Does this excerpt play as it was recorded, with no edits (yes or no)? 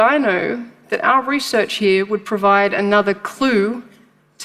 yes